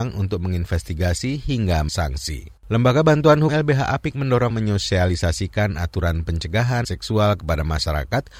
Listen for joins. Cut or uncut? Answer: cut